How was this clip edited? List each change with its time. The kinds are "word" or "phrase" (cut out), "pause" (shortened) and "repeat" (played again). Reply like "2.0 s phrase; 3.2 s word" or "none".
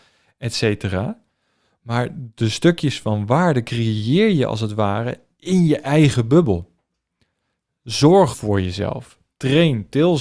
8.3 s word